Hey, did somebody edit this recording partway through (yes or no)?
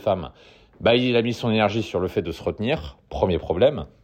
no